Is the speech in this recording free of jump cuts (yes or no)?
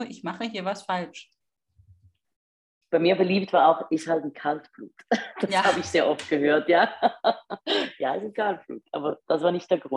yes